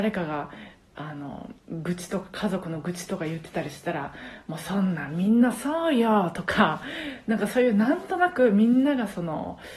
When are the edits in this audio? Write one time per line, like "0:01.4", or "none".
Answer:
0:01.6